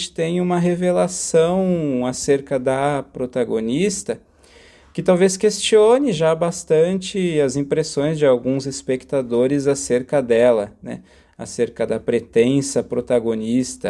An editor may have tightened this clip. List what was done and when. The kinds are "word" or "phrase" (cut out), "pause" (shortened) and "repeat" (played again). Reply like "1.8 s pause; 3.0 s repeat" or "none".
none